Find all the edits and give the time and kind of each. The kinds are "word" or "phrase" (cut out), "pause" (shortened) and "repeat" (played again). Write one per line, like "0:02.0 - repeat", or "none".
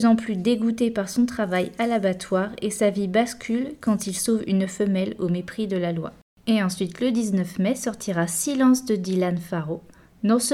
none